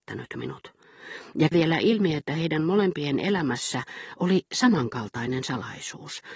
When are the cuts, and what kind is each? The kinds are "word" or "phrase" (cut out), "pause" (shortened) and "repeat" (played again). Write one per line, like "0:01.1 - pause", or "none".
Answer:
0:01.5 - word